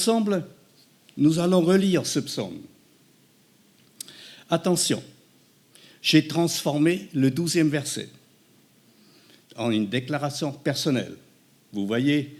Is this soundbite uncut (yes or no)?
yes